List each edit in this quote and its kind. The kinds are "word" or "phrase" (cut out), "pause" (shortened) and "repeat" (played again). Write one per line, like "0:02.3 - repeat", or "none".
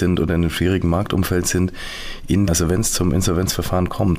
0:02.5 - phrase